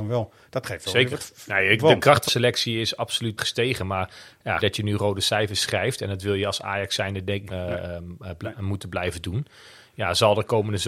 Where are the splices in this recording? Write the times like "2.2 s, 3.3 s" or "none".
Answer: 2.3 s, 3.4 s, 4.6 s, 7.5 s